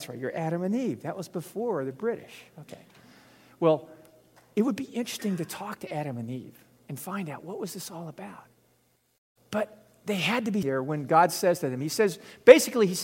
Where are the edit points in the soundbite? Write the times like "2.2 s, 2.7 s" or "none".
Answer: 10.6 s